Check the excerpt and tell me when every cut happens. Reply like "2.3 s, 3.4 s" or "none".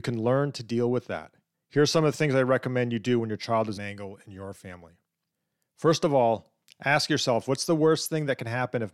1.5 s, 3.8 s, 5.3 s